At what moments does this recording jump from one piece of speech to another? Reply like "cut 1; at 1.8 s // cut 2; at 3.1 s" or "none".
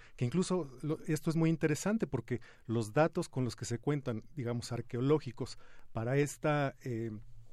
none